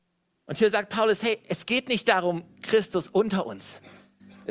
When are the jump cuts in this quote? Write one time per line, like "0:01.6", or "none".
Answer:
none